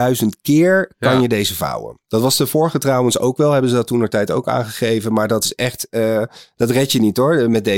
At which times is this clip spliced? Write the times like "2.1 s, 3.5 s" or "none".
none